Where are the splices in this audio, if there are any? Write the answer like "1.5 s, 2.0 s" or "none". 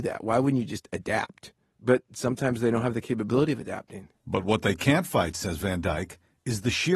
none